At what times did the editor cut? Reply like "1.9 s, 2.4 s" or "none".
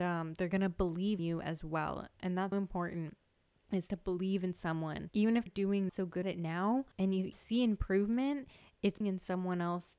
1.2 s, 2.5 s, 5.5 s, 5.9 s, 6.2 s, 7.3 s, 9.0 s